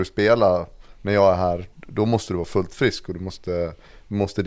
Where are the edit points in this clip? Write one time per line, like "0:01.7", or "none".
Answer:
0:01.7

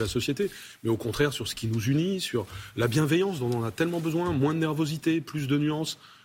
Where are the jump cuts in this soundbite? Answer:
none

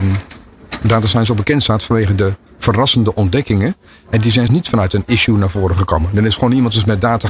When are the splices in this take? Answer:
0:04.5

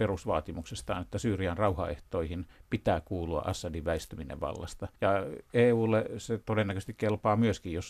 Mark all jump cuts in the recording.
0:05.0

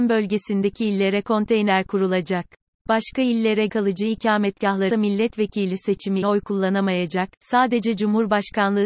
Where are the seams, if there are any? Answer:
0:02.6
0:03.7
0:04.9
0:06.2

